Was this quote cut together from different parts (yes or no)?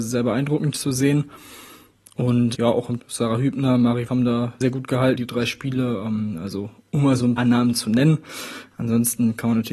yes